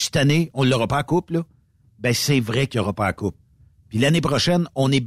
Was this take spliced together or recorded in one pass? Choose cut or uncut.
uncut